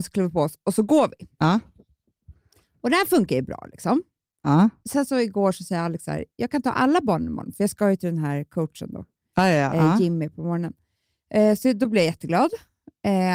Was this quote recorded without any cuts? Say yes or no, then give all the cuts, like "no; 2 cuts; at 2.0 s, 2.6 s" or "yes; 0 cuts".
yes; 0 cuts